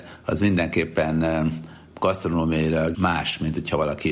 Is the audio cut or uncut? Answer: cut